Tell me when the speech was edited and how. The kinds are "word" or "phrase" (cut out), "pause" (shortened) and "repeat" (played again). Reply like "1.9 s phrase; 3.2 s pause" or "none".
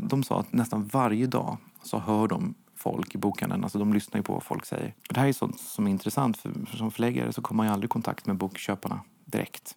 5.0 s pause